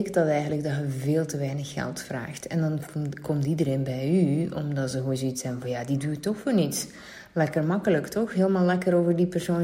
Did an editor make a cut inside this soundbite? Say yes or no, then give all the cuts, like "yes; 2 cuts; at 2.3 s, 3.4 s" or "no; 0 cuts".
no; 0 cuts